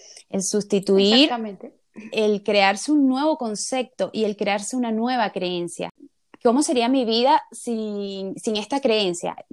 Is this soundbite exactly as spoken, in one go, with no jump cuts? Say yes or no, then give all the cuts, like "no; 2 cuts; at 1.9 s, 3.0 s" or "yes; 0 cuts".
yes; 0 cuts